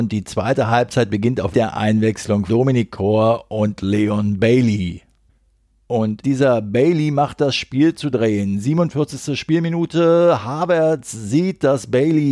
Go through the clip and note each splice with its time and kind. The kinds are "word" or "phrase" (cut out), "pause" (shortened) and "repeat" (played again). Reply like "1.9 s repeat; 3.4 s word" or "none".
1.5 s phrase; 2.5 s word; 6.2 s word; 7.4 s phrase